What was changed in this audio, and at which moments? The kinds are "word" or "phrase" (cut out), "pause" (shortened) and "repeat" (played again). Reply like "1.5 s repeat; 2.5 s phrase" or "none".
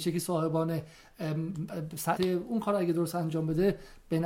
2.2 s word

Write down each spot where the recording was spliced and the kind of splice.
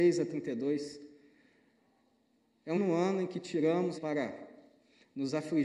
2.7 s word; 3.9 s word

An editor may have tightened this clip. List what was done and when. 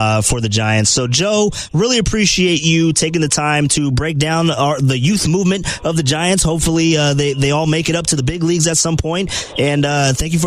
none

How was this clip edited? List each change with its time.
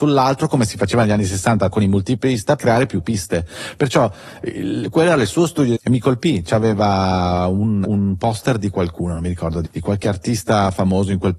1.7 s word; 2.6 s word; 5.8 s word; 7.8 s word; 9.7 s word

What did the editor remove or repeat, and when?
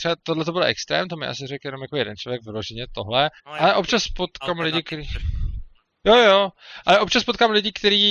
3.4 s pause

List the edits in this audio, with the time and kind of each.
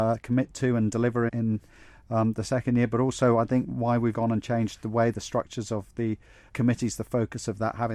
1.3 s word; 4.1 s word; 6.5 s word

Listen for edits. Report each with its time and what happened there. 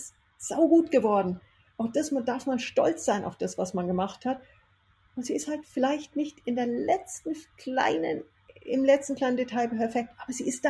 none

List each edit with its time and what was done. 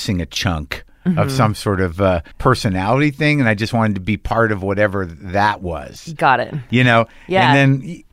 2.3 s pause

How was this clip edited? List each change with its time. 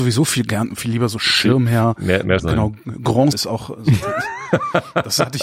2.4 s word; 3.3 s word

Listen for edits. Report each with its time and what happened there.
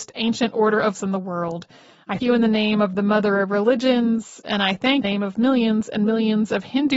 0.9 s word; 2.2 s word; 5.0 s phrase

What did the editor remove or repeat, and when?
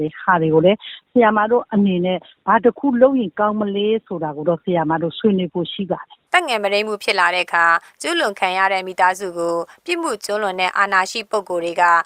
6.3 s pause

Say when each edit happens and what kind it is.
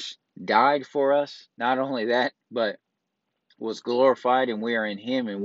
1.5 s pause

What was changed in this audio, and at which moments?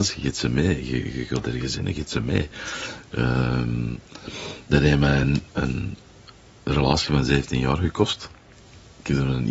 none

